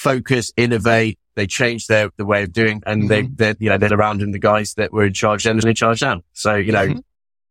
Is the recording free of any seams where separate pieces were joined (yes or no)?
no